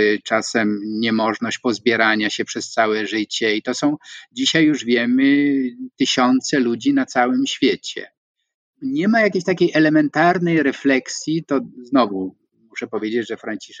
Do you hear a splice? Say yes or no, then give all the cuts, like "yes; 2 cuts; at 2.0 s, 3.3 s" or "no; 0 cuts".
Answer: no; 0 cuts